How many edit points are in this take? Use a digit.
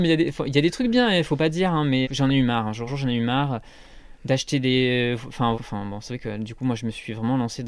3